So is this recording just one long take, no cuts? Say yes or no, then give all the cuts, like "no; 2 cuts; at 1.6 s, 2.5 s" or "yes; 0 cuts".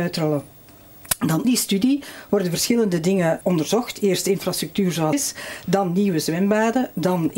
no; 3 cuts; at 1.4 s, 3.4 s, 5.1 s